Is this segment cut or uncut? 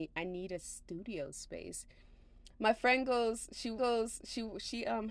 cut